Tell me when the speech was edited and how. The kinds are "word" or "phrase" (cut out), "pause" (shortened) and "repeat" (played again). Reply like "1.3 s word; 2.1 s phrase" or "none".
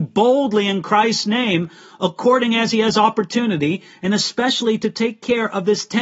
none